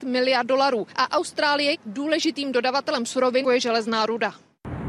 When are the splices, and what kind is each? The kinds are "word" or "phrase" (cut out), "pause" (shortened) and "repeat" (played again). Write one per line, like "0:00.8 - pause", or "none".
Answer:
0:00.9 - pause
0:01.7 - phrase
0:03.4 - word